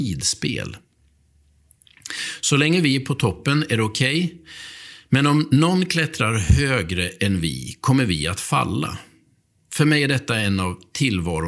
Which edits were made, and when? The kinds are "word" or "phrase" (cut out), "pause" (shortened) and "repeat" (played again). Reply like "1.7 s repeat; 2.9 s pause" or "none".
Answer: none